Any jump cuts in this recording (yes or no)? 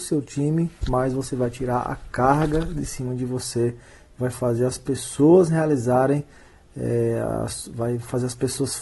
no